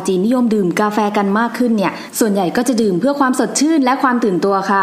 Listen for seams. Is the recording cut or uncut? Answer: uncut